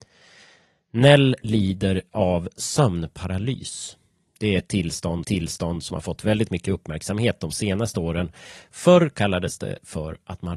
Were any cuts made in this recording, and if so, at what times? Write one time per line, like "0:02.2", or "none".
0:05.2